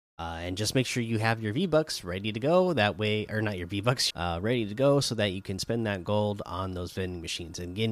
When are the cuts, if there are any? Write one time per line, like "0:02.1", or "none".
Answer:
0:04.1